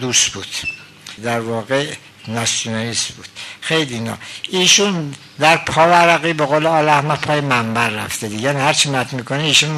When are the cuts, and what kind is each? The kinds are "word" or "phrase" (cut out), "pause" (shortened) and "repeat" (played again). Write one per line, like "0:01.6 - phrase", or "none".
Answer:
0:01.2 - word